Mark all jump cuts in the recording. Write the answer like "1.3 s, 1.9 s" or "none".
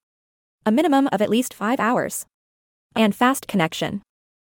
1.1 s, 2.9 s, 3.5 s